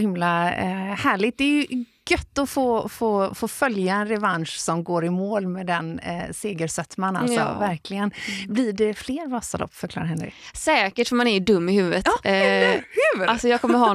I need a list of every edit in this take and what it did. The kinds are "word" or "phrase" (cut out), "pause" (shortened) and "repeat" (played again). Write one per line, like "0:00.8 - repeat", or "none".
none